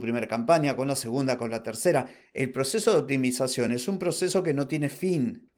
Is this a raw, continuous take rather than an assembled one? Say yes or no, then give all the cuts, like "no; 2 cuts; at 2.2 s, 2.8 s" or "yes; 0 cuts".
yes; 0 cuts